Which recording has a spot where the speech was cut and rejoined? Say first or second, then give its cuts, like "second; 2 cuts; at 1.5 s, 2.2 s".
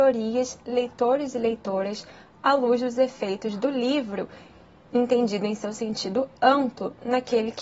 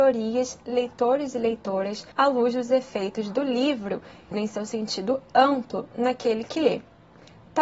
second; 2 cuts; at 2.1 s, 4.3 s